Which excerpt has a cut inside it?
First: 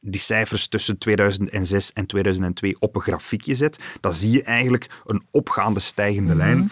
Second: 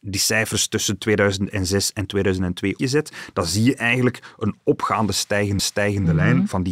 second; 2 cuts; at 2.8 s, 5.6 s

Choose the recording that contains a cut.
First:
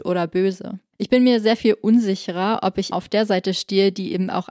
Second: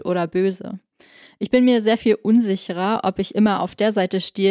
first; 2 cuts; at 0.9 s, 2.9 s

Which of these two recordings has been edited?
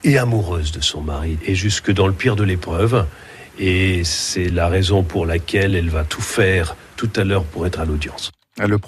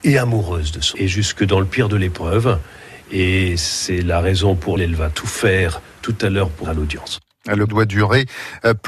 second; 4 cuts; at 0.9 s, 4.8 s, 6.6 s, 7.7 s

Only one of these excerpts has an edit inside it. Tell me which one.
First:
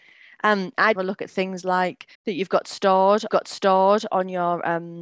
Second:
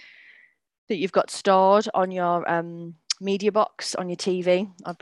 first; 3 cuts; at 1.0 s, 2.1 s, 3.3 s

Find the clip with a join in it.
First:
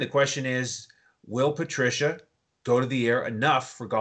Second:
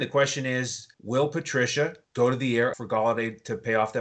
second; 3 cuts; at 0.9 s, 2.0 s, 2.7 s

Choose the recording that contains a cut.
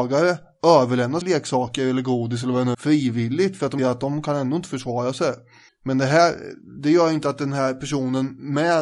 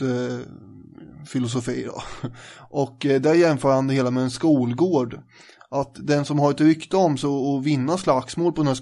first; 4 cuts; at 1.2 s, 2.7 s, 3.8 s, 5.7 s

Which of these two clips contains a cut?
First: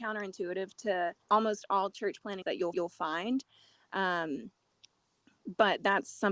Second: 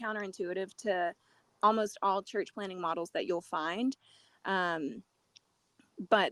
first; 3 cuts; at 1.2 s, 2.4 s, 2.7 s

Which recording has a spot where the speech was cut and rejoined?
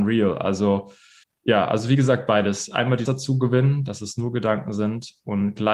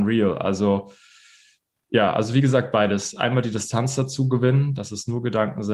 first; 2 cuts; at 1.2 s, 3.0 s

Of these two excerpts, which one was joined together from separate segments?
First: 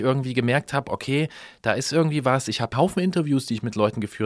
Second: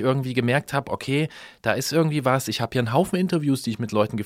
first; 1 cut; at 2.7 s

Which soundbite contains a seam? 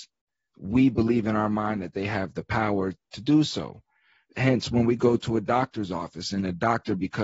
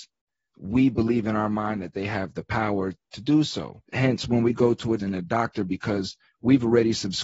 second; 2 cuts; at 3.8 s, 5.0 s

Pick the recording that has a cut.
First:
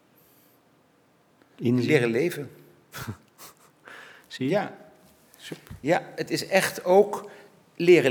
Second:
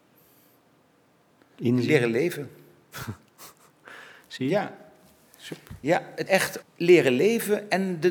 second; 2 cuts; at 6.3 s, 6.6 s

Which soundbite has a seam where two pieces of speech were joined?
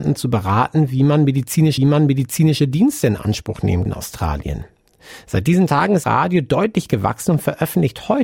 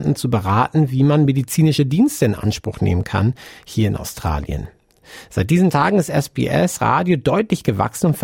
first; 3 cuts; at 1.8 s, 3.9 s, 6.0 s

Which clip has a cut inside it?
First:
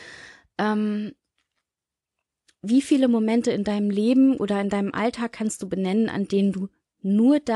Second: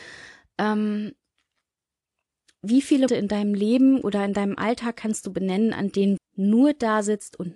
second; 2 cuts; at 3.1 s, 6.2 s

